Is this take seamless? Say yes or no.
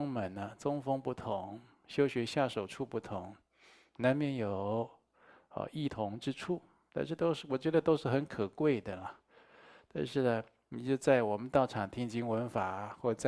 yes